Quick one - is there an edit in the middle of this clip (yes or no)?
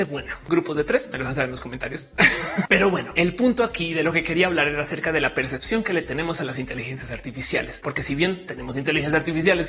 no